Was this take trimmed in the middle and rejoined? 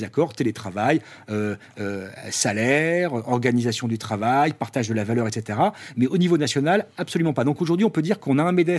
no; 0 cuts

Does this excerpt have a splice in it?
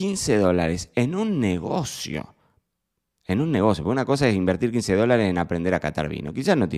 no; 0 cuts

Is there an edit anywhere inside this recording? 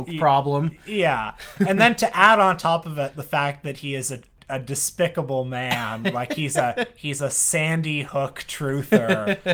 no; 0 cuts

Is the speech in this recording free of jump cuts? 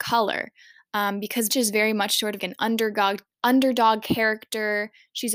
no; 2 cuts; at 1.5 s, 2.4 s

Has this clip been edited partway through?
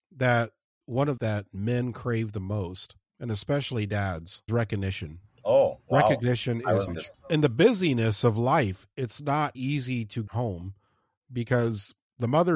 yes; 5 cuts; at 1.2 s, 4.5 s, 6.9 s, 9.5 s, 10.3 s

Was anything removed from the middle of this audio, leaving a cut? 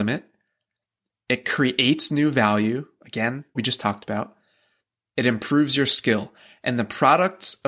yes; 1 cut; at 3.5 s

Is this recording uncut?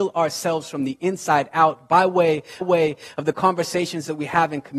no; 1 cut; at 2.6 s

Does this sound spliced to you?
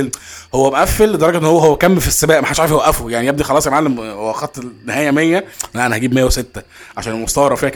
no; 0 cuts

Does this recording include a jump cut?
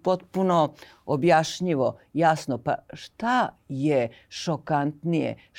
no; 0 cuts

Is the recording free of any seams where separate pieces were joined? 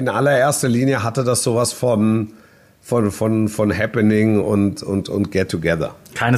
yes; 0 cuts

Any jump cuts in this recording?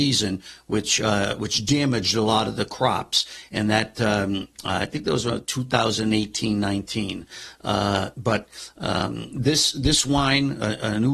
no; 0 cuts

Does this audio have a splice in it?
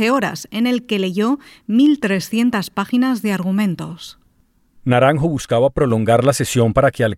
no; 0 cuts

